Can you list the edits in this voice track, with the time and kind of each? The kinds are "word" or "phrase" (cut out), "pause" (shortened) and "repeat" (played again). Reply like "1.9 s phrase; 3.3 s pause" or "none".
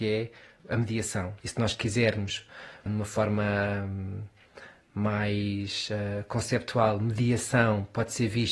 2.9 s word